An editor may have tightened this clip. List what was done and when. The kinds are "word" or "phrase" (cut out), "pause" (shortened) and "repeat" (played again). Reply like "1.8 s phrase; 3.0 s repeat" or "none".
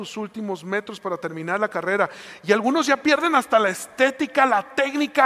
none